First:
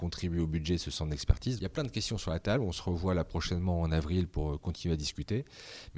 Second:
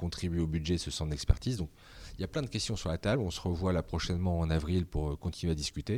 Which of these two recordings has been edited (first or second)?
first